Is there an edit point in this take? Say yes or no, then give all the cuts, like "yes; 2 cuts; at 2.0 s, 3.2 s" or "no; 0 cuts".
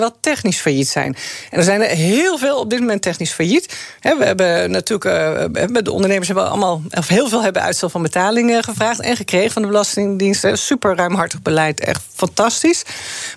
no; 0 cuts